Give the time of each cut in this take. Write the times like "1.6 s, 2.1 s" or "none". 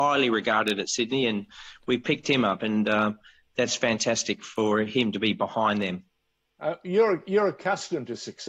none